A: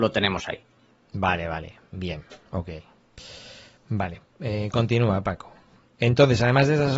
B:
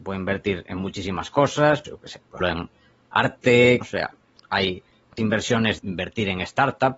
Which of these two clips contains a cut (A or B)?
B